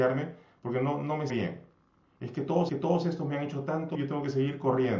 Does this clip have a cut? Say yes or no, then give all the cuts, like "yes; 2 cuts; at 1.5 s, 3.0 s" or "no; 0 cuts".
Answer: yes; 3 cuts; at 1.3 s, 2.7 s, 3.9 s